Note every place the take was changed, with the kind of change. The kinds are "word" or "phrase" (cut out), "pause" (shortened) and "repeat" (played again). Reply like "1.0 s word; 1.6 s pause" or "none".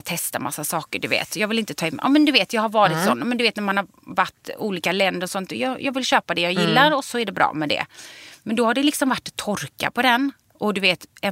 none